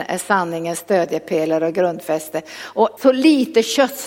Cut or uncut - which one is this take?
cut